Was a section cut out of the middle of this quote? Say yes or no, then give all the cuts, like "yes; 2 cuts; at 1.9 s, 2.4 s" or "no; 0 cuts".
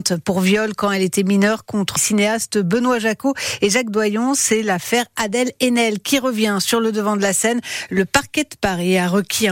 yes; 1 cut; at 2.0 s